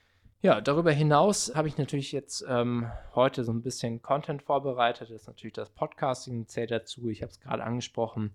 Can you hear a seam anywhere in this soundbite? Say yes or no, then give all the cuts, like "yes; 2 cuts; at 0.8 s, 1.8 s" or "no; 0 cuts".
yes; 1 cut; at 1.5 s